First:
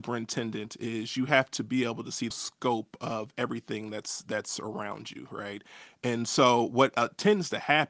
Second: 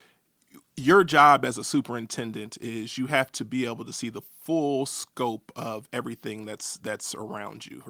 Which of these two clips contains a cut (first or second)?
first